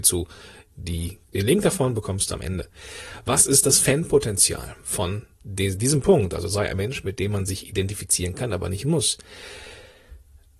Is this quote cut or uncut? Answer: cut